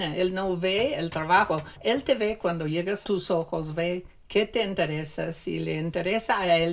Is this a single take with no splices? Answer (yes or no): no